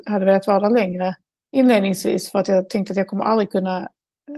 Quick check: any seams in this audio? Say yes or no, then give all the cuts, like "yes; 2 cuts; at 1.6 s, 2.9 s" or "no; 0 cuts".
no; 0 cuts